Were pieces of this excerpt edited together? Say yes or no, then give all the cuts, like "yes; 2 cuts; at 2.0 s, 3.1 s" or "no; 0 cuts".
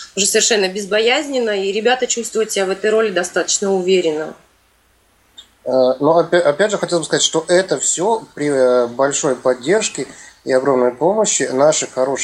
no; 0 cuts